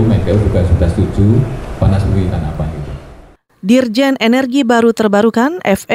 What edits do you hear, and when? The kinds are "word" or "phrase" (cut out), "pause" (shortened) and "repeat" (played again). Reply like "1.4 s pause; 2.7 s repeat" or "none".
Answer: 1.8 s phrase; 2.3 s phrase